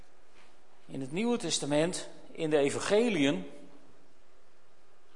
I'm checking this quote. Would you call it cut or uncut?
uncut